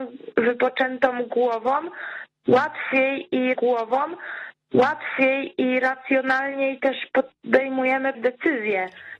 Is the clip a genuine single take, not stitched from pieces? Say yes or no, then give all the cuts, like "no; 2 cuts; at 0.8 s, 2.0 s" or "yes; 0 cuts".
no; 2 cuts; at 3.5 s, 8.1 s